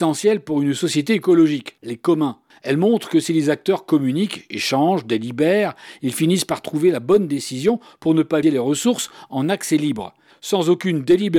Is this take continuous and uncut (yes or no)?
no